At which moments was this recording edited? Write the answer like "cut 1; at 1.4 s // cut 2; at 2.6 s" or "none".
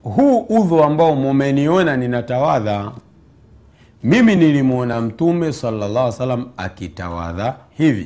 none